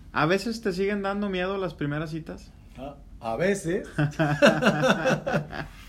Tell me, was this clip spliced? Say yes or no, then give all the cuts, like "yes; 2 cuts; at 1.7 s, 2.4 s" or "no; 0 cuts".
no; 0 cuts